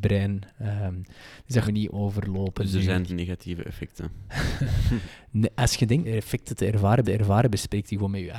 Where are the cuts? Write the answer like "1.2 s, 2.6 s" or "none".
1.6 s, 3.1 s, 6.0 s, 7.0 s